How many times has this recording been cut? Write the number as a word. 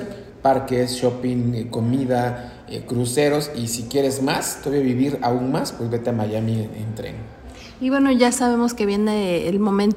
zero